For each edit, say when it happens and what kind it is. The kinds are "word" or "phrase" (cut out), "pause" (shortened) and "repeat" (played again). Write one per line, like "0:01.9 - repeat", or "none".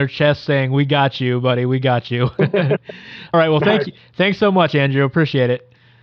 0:03.3 - word